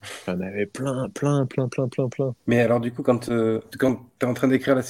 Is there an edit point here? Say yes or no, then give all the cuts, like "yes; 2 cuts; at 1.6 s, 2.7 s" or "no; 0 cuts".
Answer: yes; 1 cut; at 2.4 s